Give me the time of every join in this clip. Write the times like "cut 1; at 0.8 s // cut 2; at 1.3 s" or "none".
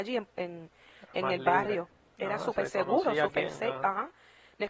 none